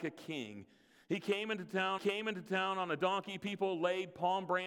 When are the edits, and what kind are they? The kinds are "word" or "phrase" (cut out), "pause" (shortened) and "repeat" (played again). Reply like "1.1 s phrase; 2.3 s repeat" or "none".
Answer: 2.0 s repeat